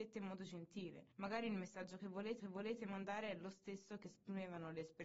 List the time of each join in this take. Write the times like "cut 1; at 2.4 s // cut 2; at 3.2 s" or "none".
cut 1; at 1.1 s // cut 2; at 2.4 s